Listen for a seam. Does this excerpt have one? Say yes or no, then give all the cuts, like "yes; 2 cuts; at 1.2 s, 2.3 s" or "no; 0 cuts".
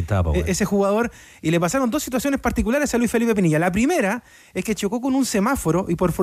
no; 0 cuts